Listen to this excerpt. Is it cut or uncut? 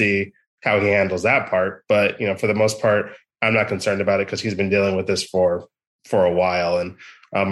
uncut